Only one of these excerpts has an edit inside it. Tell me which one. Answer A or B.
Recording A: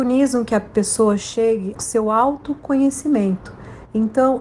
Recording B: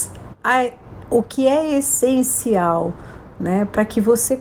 A